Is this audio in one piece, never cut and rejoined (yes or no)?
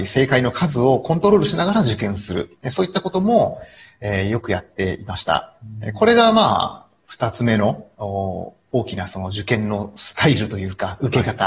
no